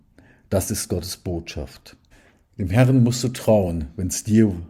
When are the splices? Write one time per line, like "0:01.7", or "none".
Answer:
0:02.1